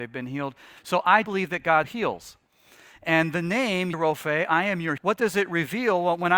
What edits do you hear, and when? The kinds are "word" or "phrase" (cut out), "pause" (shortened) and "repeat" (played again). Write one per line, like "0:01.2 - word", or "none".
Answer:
0:01.2 - word
0:01.8 - word
0:03.9 - word
0:05.0 - word